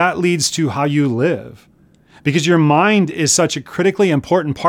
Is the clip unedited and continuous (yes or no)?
yes